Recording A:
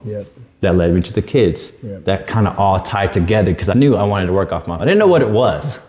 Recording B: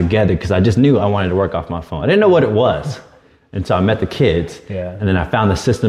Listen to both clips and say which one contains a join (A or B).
A